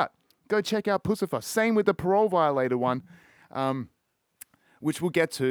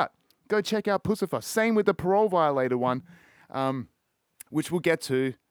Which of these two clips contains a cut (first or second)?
second